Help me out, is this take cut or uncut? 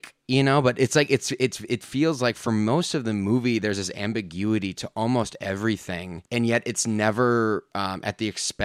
uncut